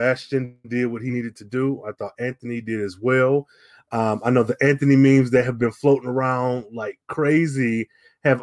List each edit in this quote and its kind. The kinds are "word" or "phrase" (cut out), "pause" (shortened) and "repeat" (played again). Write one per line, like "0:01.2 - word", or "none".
none